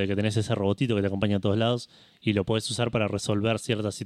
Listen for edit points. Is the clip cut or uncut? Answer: uncut